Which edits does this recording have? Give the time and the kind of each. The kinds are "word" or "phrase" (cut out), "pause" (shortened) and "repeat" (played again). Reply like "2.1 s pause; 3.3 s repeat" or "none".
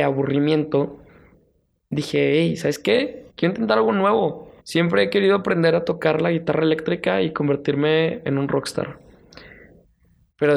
3.3 s pause; 4.6 s pause